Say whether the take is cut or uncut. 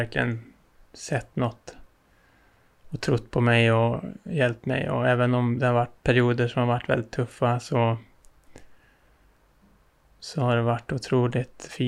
uncut